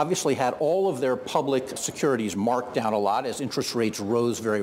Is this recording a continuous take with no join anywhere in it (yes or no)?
no